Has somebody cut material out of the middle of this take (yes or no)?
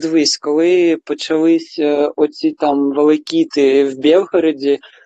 no